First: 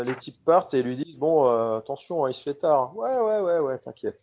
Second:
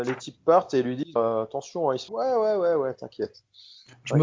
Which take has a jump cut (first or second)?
second